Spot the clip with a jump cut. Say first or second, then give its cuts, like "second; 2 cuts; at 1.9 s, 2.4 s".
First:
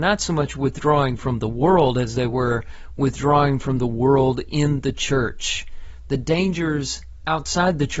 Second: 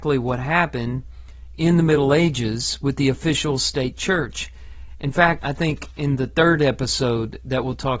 second; 1 cut; at 5.4 s